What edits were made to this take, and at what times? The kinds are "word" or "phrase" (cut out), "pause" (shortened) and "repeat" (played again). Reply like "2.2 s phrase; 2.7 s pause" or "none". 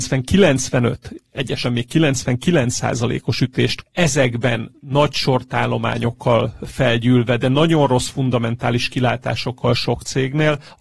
1.6 s word; 3.8 s word